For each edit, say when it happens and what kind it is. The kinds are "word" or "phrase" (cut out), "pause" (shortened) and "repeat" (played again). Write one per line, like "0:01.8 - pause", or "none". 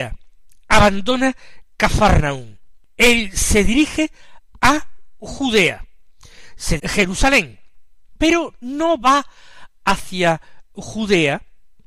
0:06.8 - phrase